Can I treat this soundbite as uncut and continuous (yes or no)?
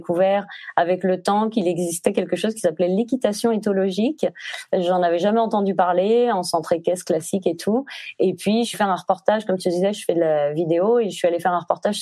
no